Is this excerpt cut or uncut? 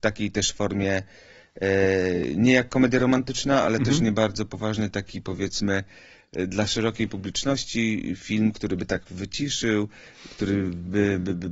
uncut